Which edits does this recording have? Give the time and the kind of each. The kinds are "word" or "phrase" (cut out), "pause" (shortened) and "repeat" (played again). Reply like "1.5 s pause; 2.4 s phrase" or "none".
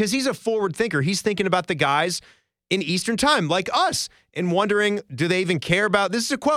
none

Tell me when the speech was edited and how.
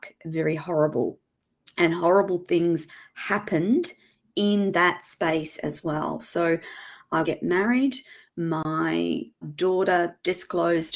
7.2 s phrase; 9.4 s word

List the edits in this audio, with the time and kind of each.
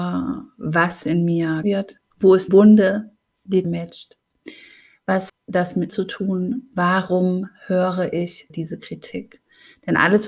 1.6 s word; 2.5 s word; 3.6 s word; 5.3 s word; 5.9 s word; 8.5 s word

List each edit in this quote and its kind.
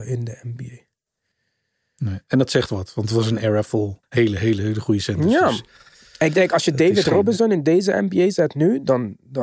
4.0 s pause

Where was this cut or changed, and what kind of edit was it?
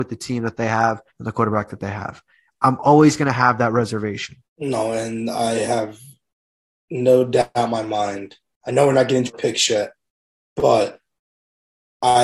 1.1 s pause; 4.5 s pause; 9.3 s phrase

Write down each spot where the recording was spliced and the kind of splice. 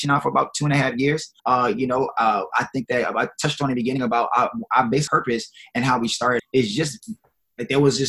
1.4 s pause; 5.1 s word; 6.4 s word

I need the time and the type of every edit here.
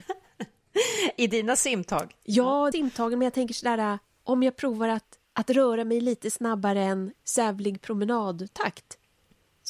2.7 s word; 4.0 s pause; 5.2 s pause; 7.2 s pause

